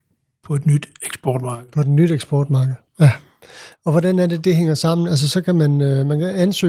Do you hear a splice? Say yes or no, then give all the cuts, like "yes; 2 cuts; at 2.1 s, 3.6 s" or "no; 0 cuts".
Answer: no; 0 cuts